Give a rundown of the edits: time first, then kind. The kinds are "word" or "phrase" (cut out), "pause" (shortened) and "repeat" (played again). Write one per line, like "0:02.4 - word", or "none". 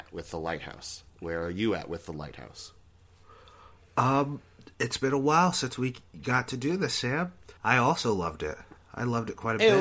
0:01.1 - pause
0:07.6 - pause